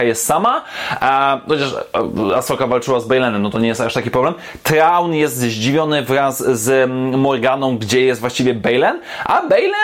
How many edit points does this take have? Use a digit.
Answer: 0